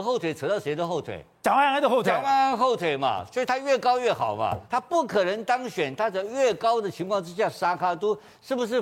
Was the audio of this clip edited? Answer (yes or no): yes